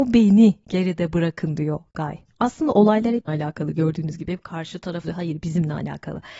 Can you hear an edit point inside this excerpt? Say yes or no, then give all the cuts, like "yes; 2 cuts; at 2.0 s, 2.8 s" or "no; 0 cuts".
yes; 2 cuts; at 3.3 s, 5.0 s